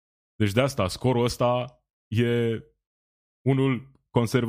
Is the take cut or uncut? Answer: uncut